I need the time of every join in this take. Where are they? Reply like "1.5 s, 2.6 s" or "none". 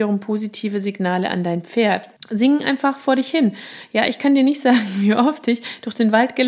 2.2 s